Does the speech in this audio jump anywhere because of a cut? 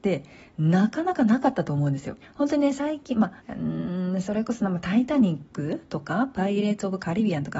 yes; 2 cuts; at 2.2 s, 3.4 s

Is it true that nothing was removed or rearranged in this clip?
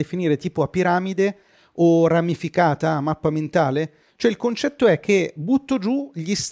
yes; 0 cuts

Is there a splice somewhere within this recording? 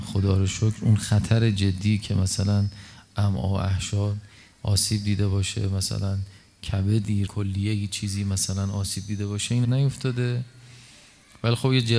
yes; 2 cuts; at 7.3 s, 9.6 s

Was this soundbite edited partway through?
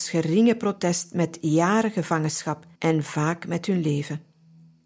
yes; 1 cut; at 2.7 s

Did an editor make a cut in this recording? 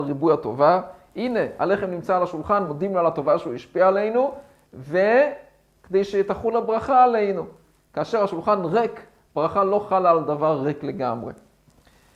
no; 0 cuts

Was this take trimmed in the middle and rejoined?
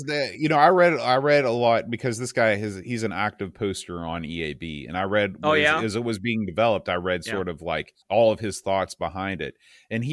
yes; 1 cut; at 8.0 s

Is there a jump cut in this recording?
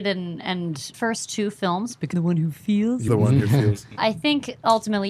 yes; 4 cuts; at 0.9 s, 2.1 s, 3.1 s, 4.0 s

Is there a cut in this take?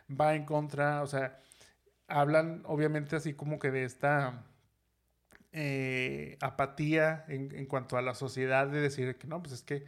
no; 0 cuts

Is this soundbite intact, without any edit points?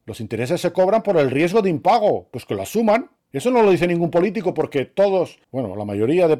no; 2 cuts; at 3.2 s, 5.4 s

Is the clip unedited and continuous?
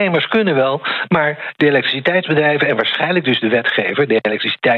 yes; 0 cuts

